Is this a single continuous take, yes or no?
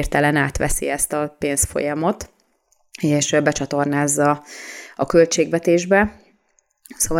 yes